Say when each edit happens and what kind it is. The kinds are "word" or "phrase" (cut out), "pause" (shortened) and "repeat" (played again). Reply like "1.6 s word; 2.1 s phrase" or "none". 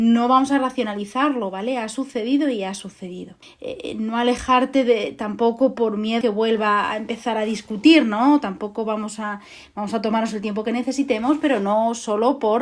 3.4 s pause; 6.2 s word